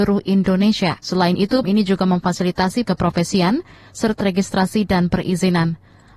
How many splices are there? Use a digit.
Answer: 4